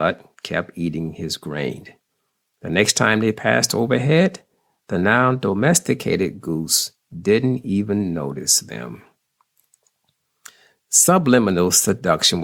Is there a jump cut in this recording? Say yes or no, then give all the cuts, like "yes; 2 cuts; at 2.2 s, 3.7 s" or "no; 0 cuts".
no; 0 cuts